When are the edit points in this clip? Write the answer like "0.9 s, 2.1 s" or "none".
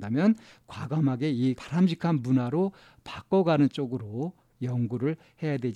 1.6 s